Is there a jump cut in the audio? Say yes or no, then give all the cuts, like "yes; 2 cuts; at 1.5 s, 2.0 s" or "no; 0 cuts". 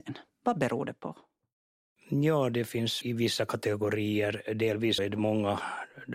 yes; 2 cuts; at 3.0 s, 5.0 s